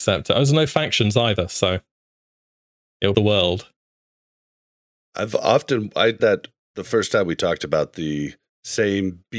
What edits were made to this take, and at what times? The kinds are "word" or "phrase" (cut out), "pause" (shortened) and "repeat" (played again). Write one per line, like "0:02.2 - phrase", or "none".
0:03.1 - phrase
0:06.2 - word
0:08.5 - pause